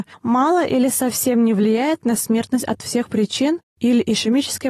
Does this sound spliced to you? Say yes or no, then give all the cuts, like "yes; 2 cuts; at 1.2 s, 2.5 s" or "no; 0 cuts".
no; 0 cuts